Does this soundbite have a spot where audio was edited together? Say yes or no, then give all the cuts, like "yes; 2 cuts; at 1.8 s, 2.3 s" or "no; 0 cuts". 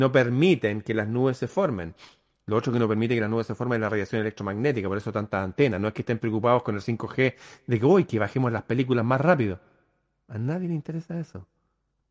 no; 0 cuts